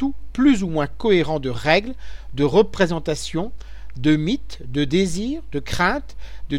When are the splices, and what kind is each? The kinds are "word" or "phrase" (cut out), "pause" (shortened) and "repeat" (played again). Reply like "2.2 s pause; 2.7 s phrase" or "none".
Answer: none